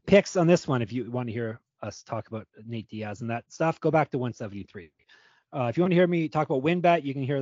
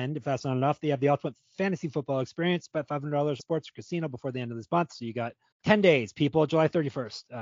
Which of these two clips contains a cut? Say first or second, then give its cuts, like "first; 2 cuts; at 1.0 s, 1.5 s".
second; 2 cuts; at 3.4 s, 5.5 s